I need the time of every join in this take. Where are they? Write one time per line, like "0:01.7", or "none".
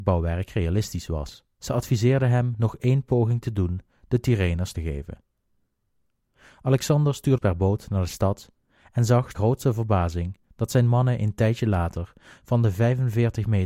0:01.5
0:04.7
0:07.4
0:09.3